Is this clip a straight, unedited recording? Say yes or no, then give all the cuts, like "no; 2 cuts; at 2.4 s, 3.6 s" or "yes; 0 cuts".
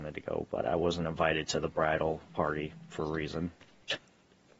no; 2 cuts; at 2.3 s, 3.0 s